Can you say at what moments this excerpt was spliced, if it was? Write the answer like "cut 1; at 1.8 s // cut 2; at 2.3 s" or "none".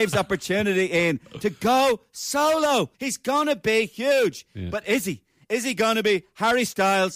cut 1; at 2.9 s